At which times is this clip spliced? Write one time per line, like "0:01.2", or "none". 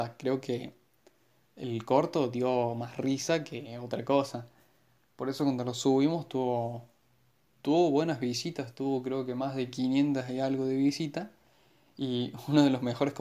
none